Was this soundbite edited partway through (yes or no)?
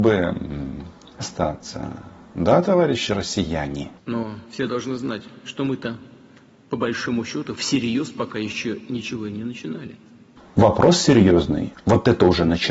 yes